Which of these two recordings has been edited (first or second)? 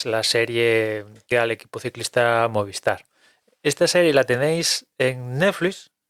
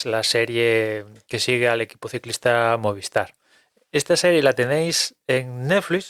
first